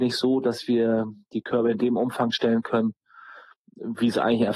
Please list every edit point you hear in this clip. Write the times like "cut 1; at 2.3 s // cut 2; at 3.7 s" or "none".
none